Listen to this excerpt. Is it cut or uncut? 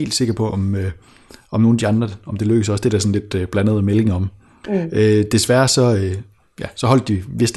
uncut